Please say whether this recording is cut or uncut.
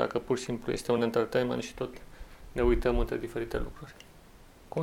uncut